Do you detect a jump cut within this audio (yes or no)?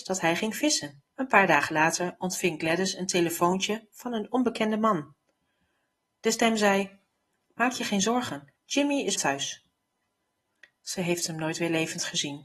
yes